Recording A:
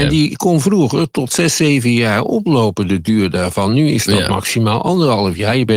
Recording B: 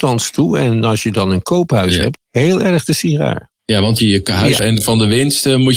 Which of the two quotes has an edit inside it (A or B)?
B